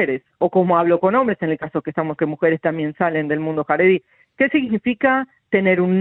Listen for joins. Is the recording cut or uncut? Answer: cut